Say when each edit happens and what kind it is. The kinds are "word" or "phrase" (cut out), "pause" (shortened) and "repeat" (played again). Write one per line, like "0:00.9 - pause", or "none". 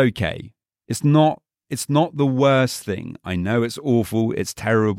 none